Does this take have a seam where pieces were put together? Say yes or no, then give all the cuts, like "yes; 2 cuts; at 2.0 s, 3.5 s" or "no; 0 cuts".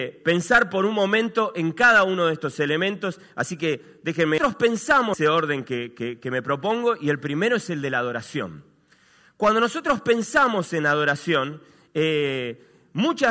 no; 0 cuts